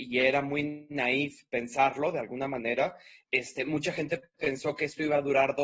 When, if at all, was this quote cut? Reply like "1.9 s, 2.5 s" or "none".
none